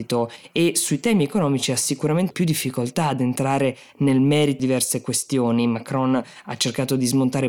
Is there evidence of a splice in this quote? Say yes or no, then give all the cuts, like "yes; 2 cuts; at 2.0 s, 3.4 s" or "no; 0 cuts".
yes; 2 cuts; at 2.3 s, 4.6 s